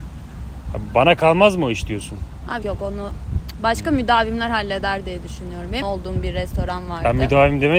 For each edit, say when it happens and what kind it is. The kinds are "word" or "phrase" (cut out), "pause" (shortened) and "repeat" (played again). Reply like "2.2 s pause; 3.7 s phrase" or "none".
2.6 s word; 5.8 s phrase

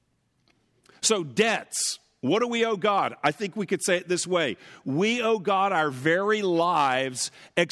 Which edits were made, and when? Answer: none

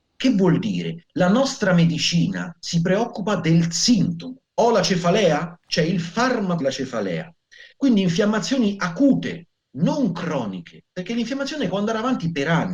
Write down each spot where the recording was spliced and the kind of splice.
1.0 s pause; 4.4 s pause; 6.6 s word; 7.7 s pause; 11.7 s word

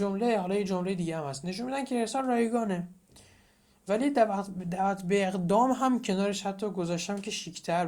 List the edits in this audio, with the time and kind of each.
none

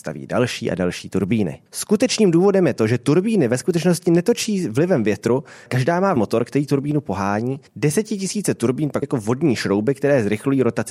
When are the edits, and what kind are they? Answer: 1.7 s pause; 5.7 s word; 6.2 s word; 7.7 s pause; 9.0 s word

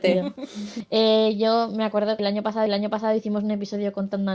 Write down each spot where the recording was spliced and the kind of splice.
2.2 s word; 2.7 s repeat

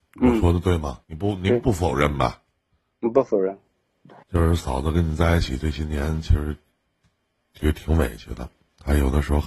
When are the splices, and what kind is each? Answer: 1.0 s pause; 4.2 s pause

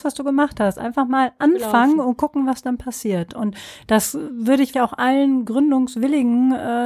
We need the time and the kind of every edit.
4.7 s word

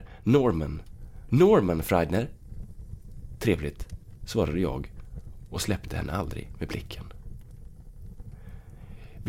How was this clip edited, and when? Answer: none

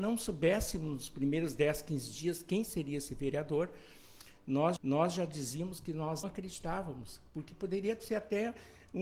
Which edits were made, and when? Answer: 4.8 s repeat; 6.2 s word

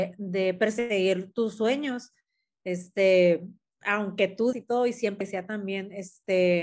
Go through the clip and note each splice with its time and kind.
4.5 s word; 5.2 s word

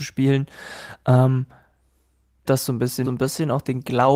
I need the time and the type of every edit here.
2.4 s word; 3.0 s phrase

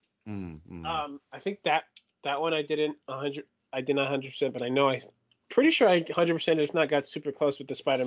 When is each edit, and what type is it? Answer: none

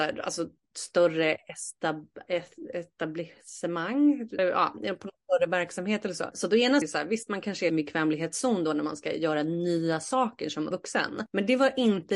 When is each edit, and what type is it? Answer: 4.4 s word; 6.8 s phrase; 7.7 s phrase; 10.7 s word

